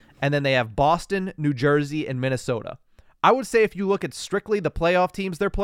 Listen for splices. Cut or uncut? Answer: uncut